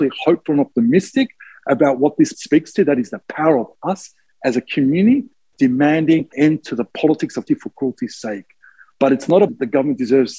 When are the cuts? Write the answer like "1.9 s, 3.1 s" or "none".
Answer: 2.3 s, 6.3 s, 7.5 s, 9.5 s